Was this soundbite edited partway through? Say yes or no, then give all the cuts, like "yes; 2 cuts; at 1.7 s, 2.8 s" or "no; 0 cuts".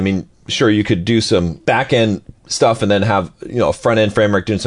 no; 0 cuts